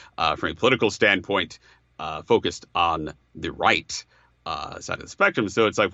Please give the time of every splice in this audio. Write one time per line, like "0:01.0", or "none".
none